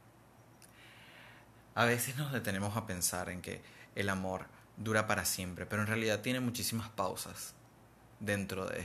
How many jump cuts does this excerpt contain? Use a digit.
0